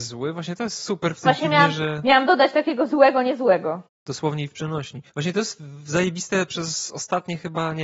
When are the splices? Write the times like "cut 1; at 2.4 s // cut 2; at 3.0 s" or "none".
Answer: cut 1; at 5.1 s